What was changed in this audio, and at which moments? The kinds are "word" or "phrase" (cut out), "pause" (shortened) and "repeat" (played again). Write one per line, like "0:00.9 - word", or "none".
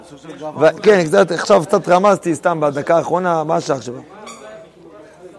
none

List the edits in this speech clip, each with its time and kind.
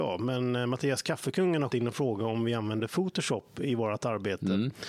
0:01.7 - word

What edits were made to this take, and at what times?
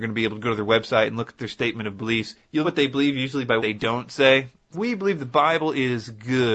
0:02.6 - word
0:03.6 - word
0:04.7 - word

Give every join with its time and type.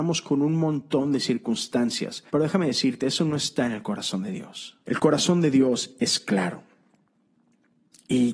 0:02.3 - pause
0:04.8 - pause

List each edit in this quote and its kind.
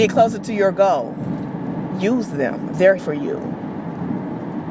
0:03.0 - word

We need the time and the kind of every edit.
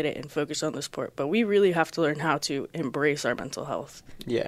none

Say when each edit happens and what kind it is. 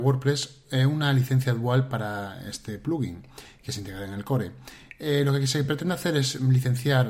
none

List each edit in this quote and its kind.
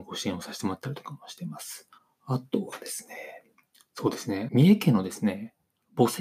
0:02.0 - pause
0:03.5 - pause
0:04.5 - phrase

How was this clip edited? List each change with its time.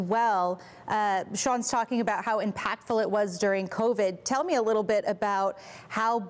none

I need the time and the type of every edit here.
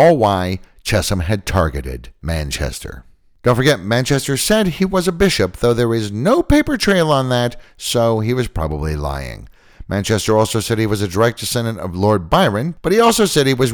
none

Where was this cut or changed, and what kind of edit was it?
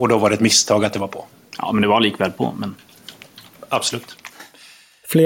0:01.3 - pause

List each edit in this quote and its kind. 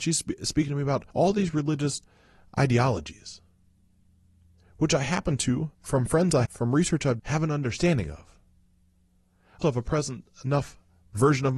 0:01.1 - pause
0:05.7 - pause
0:06.5 - word
0:07.2 - word
0:09.6 - word

